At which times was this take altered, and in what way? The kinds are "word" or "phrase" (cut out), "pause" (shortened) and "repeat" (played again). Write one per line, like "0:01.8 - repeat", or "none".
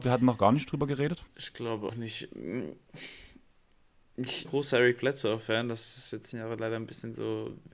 0:01.3 - pause
0:01.9 - word
0:04.4 - phrase
0:06.3 - phrase